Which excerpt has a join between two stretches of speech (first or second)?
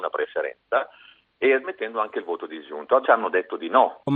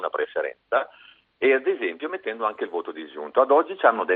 first